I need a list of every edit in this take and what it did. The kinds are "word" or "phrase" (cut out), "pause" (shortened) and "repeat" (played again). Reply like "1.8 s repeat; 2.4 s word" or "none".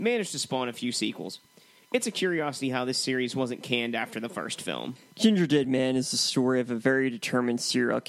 none